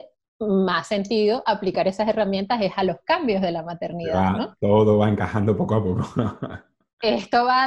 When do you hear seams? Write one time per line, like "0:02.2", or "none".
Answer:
none